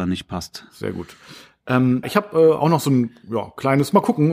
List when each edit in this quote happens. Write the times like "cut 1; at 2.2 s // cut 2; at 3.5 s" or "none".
cut 1; at 2.0 s